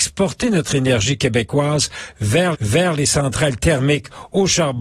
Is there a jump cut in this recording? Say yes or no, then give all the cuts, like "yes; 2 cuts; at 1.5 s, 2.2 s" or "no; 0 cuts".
yes; 1 cut; at 2.5 s